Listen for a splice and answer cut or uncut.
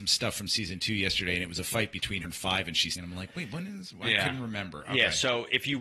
cut